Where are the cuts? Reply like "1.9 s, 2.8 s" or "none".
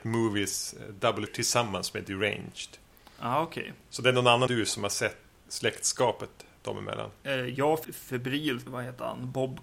1.3 s, 4.5 s, 5.3 s, 7.8 s, 8.7 s